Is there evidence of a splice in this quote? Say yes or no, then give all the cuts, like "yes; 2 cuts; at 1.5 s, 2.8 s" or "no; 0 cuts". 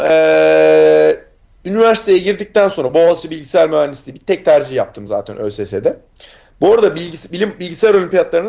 no; 0 cuts